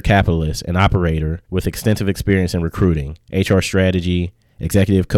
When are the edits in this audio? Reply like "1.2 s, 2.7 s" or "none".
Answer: 1.4 s